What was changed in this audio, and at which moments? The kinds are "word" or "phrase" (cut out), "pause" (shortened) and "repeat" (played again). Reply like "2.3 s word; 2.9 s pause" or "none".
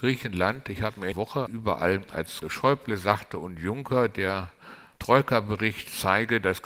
1.1 s phrase; 1.5 s word; 2.4 s word; 4.9 s pause